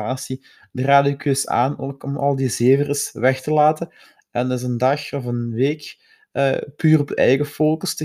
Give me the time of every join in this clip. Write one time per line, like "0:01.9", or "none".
none

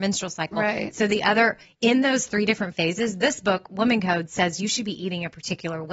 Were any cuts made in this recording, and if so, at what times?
none

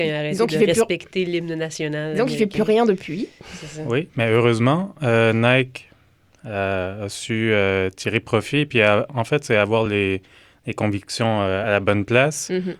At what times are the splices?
none

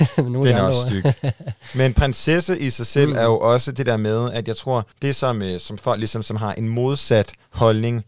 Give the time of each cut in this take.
0:04.9

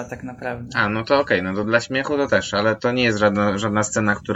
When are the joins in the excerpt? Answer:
none

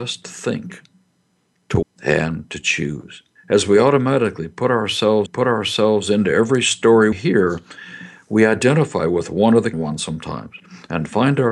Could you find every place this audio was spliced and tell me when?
0:01.8
0:03.4
0:05.3
0:07.1
0:09.7

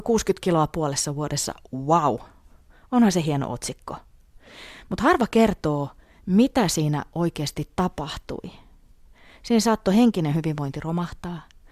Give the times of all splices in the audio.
none

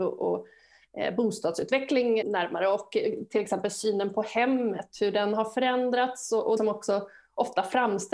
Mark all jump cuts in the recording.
0:02.2
0:06.6

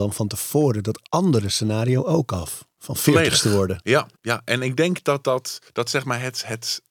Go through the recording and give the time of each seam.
0:04.2
0:05.7

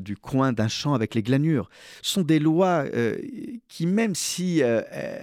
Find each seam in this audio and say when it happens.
none

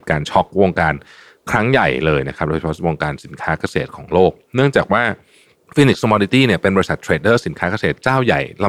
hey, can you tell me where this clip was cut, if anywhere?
none

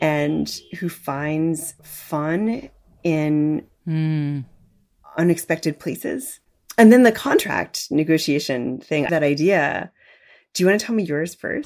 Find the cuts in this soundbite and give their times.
0:01.8
0:09.1

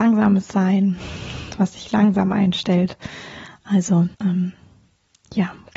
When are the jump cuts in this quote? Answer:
0:04.1

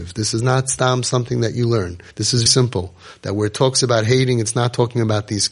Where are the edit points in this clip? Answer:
0:02.1
0:02.5

